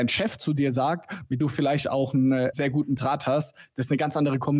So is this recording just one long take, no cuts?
no; 3 cuts; at 1.4 s, 2.5 s, 3.0 s

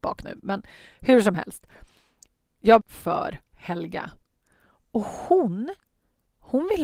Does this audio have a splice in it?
yes; 1 cut; at 2.8 s

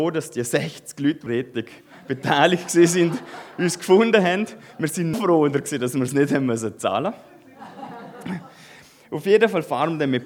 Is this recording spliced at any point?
yes; 2 cuts; at 1.3 s, 5.1 s

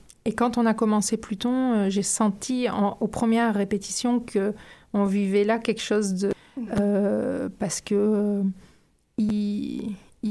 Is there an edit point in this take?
no; 0 cuts

